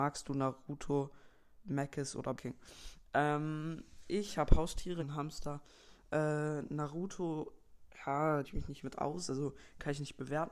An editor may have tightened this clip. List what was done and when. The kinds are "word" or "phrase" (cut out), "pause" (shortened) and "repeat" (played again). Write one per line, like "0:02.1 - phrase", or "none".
0:02.3 - word
0:05.0 - word
0:08.4 - word
0:08.8 - word